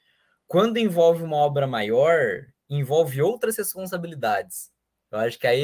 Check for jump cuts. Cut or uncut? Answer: uncut